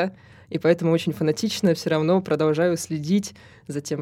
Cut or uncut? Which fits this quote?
uncut